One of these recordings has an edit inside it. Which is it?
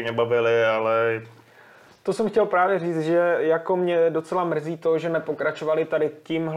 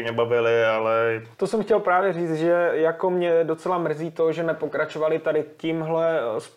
second; 1 cut; at 1.3 s

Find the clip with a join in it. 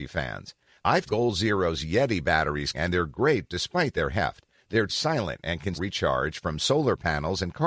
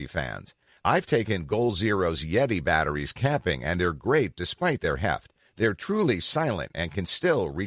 first; 4 cuts; at 1.1 s, 2.7 s, 4.9 s, 5.7 s

